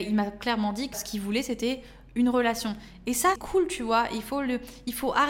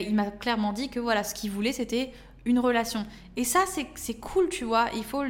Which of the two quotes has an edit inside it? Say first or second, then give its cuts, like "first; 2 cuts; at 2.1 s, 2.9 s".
first; 2 cuts; at 0.9 s, 3.4 s